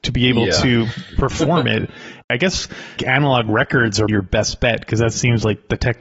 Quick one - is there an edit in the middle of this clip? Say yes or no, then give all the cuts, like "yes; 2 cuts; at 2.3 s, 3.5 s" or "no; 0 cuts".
yes; 2 cuts; at 3.0 s, 4.1 s